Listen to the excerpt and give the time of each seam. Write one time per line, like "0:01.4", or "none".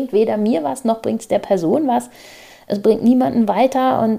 none